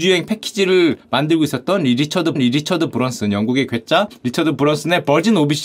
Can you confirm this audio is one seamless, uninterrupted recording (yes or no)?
no